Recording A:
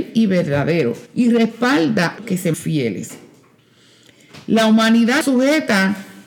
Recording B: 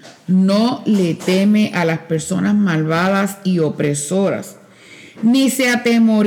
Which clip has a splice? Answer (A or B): A